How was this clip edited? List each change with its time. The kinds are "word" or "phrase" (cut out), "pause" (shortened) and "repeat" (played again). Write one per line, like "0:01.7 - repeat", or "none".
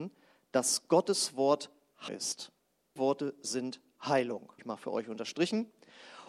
0:02.1 - word
0:03.0 - word
0:04.6 - word